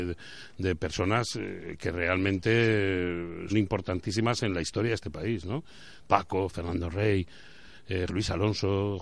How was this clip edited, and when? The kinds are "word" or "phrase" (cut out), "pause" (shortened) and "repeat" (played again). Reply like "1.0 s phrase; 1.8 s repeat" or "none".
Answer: 3.5 s word; 8.1 s word